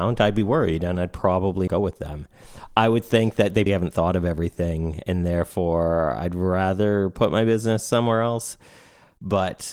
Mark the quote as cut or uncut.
cut